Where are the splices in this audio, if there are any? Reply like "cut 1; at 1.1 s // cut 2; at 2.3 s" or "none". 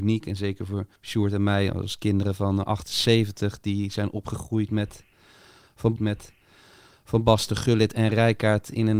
cut 1; at 1.0 s // cut 2; at 6.0 s